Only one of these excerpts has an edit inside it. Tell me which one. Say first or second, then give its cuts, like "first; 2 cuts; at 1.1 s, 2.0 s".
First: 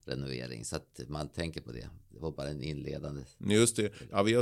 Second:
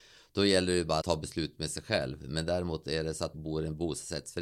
second; 2 cuts; at 1.0 s, 3.3 s